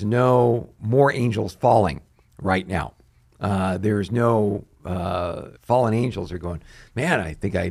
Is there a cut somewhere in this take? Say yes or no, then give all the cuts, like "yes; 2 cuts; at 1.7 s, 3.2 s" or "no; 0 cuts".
yes; 1 cut; at 5.6 s